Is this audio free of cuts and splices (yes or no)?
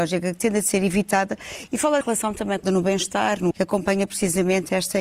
no